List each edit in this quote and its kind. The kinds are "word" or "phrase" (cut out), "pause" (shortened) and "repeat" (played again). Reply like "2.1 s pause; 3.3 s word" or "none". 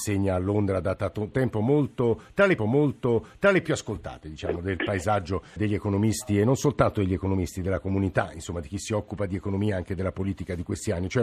1.3 s word; 2.6 s repeat; 5.6 s word